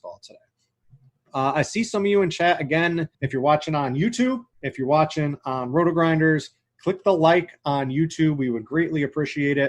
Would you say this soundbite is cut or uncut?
cut